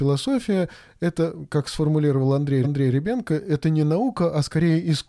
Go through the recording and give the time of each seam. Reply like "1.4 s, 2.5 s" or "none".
2.6 s